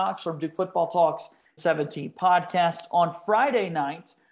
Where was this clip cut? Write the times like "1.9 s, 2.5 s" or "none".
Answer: 1.6 s